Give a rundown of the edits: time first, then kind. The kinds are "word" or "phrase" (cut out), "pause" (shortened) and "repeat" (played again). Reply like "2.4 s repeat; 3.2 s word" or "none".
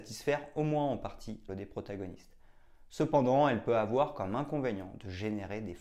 1.5 s word